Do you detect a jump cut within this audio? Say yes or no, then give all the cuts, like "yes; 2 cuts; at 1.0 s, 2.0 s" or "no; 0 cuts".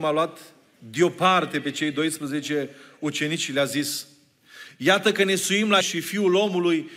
yes; 1 cut; at 5.8 s